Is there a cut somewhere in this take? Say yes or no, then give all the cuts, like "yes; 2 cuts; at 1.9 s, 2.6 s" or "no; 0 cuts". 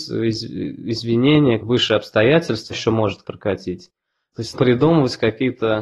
yes; 4 cuts; at 1.6 s, 2.7 s, 3.2 s, 4.5 s